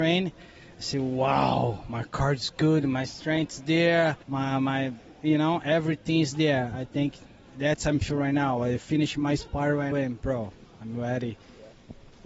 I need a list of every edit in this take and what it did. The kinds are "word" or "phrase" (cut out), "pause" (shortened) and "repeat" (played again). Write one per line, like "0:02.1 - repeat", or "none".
0:04.2 - pause
0:09.9 - word